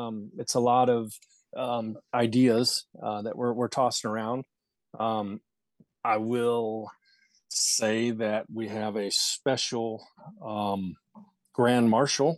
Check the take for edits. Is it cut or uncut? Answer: uncut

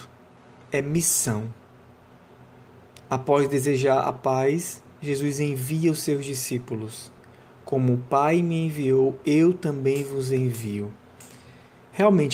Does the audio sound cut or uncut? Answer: uncut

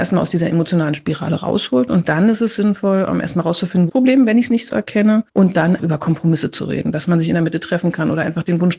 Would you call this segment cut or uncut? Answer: cut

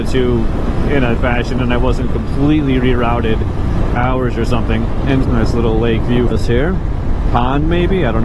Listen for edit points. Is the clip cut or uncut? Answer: cut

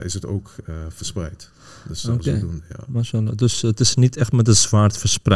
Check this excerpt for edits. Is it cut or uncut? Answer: uncut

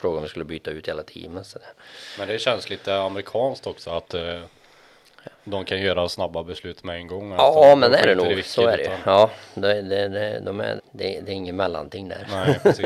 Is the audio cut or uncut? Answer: cut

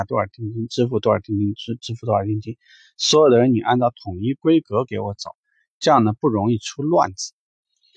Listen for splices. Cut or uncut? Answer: uncut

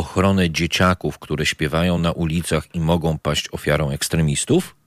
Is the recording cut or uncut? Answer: uncut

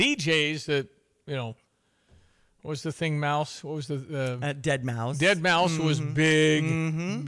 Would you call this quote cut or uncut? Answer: uncut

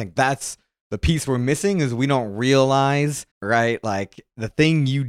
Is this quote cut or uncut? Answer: cut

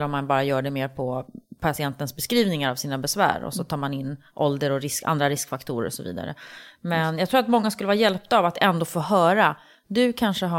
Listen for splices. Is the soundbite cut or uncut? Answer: uncut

